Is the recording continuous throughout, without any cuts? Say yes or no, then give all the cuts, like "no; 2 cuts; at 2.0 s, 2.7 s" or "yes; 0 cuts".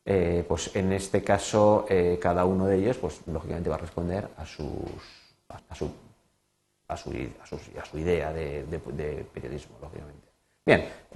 no; 3 cuts; at 4.3 s, 5.6 s, 8.6 s